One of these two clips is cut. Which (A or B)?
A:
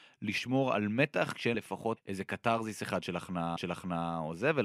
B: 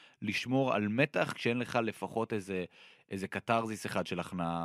A